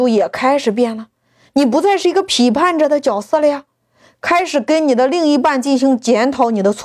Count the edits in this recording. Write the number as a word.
zero